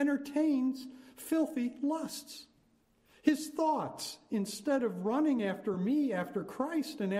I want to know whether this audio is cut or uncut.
uncut